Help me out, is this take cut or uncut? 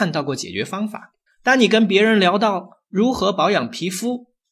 cut